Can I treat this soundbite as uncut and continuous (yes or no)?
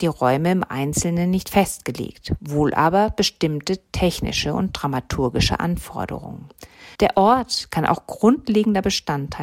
no